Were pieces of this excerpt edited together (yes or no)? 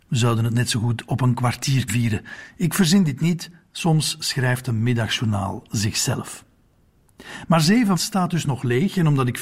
yes